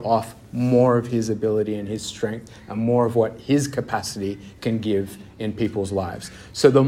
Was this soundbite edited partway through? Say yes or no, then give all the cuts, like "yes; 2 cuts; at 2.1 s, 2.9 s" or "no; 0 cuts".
no; 0 cuts